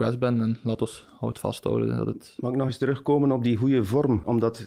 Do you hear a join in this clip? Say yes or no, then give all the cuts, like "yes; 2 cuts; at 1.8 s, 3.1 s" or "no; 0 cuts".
no; 0 cuts